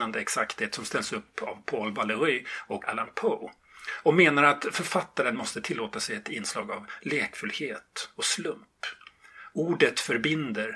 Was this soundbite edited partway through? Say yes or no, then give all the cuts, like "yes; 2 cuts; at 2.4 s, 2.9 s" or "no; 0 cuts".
yes; 1 cut; at 2.8 s